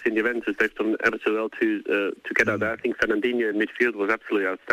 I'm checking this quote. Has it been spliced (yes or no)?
no